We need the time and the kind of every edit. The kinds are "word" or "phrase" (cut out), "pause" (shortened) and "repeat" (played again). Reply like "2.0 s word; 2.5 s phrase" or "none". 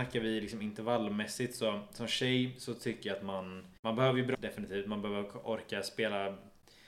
3.8 s pause; 4.3 s word